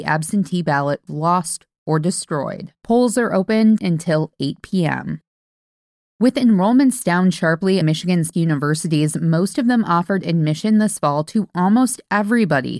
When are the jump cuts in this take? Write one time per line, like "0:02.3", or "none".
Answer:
0:01.1
0:03.8
0:07.8
0:08.3

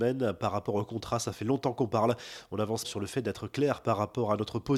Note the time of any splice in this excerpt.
0:02.8

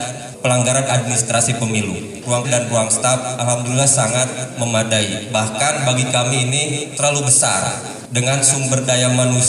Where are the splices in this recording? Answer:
0:02.4

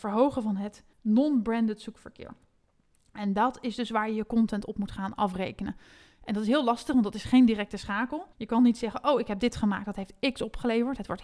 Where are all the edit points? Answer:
0:00.9
0:08.3

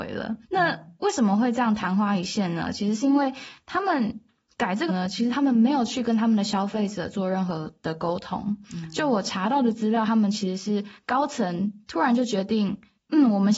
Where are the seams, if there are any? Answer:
0:04.9

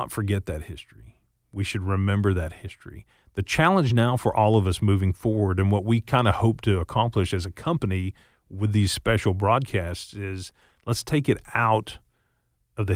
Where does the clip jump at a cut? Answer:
none

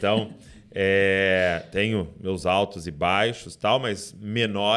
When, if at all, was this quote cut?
none

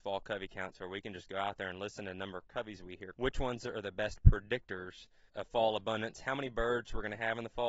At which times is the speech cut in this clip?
0:03.1
0:05.3

